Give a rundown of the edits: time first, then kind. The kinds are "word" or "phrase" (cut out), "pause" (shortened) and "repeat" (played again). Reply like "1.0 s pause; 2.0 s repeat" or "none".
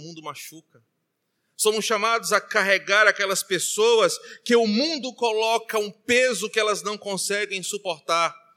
none